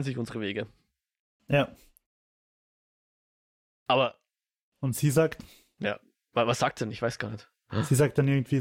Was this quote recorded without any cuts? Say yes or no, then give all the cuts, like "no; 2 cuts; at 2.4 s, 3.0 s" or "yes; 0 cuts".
yes; 0 cuts